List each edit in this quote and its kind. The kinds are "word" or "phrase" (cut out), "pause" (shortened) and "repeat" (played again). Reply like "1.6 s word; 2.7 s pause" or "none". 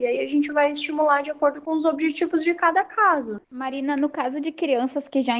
3.4 s pause

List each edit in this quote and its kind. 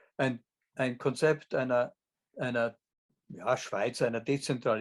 2.1 s pause

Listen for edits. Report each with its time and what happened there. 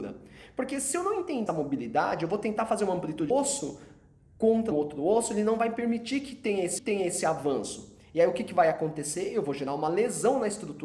1.5 s word; 3.3 s phrase; 4.7 s word; 6.8 s repeat

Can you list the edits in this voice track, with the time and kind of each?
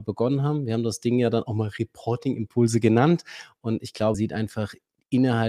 4.1 s word

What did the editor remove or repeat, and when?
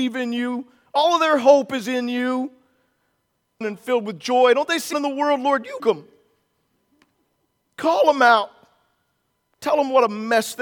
3.6 s phrase; 4.9 s phrase; 5.8 s word

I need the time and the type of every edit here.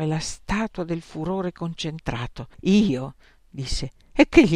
2.5 s pause

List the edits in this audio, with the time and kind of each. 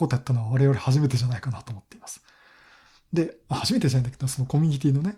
none

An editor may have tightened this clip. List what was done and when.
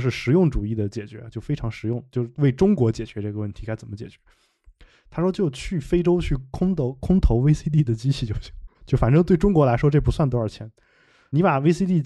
8.7 s pause

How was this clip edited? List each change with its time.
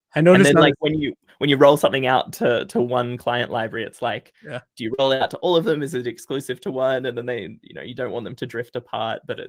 none

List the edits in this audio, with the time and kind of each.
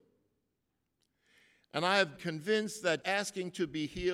2.2 s word; 3.0 s word

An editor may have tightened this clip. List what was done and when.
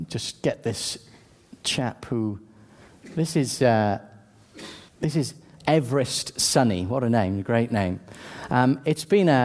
4.9 s pause

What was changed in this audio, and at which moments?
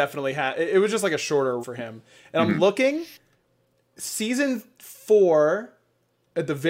1.6 s word

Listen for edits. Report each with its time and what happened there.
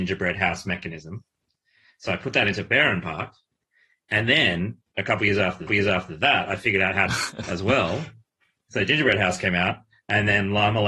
5.7 s repeat; 7.1 s phrase

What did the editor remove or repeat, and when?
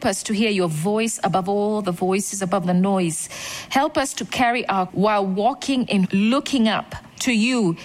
2.6 s word; 4.9 s word; 6.0 s word

